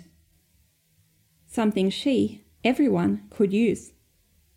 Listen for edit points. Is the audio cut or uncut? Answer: cut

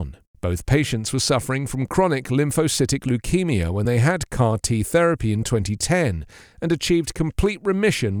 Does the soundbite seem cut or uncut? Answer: uncut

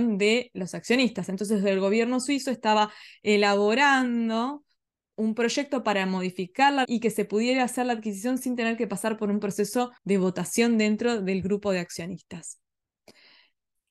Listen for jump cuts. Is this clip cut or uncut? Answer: cut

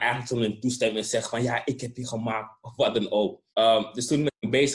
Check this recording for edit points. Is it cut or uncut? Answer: cut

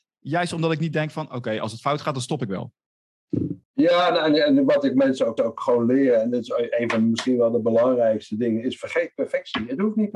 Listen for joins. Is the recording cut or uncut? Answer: cut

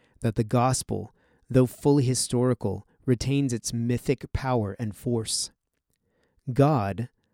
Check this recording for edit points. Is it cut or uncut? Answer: uncut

